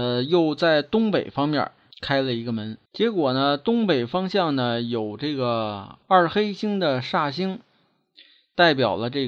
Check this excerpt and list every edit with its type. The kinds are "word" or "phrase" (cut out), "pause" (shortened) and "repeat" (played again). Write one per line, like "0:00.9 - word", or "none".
0:01.9 - pause
0:02.9 - pause
0:06.0 - pause